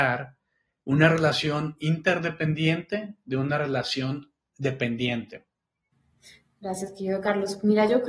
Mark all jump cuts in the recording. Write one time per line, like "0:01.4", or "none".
none

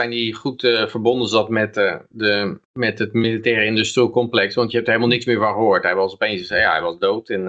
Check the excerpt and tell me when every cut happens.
0:02.6

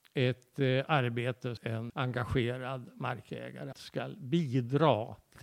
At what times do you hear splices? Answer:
0:01.6
0:01.9
0:03.7

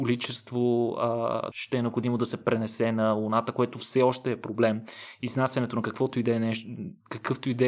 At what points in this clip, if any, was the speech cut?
0:01.5

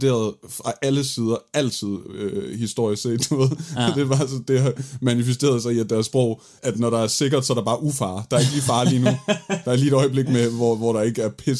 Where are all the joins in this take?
0:06.6

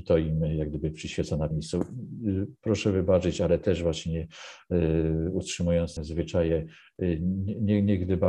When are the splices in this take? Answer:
0:01.5
0:06.0

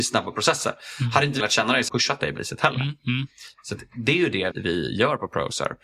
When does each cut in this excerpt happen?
0:01.4
0:01.9
0:02.4
0:04.5

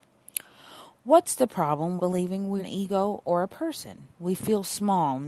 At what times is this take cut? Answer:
0:02.0
0:02.6
0:04.1

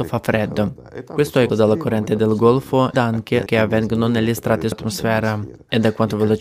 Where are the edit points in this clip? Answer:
0:01.5
0:02.9
0:03.5
0:04.7

